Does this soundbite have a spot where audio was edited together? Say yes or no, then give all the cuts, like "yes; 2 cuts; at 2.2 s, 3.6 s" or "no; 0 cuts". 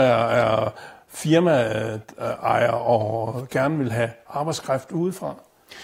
no; 0 cuts